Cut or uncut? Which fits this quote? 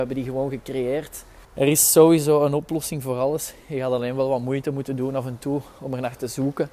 cut